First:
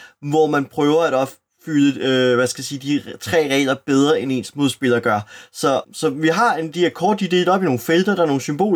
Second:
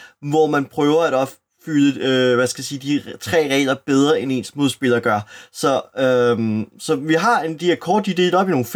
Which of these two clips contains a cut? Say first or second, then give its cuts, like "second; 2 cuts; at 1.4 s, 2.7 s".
first; 1 cut; at 5.8 s